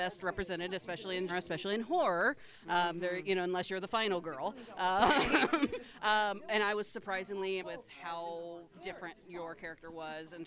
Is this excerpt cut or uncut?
cut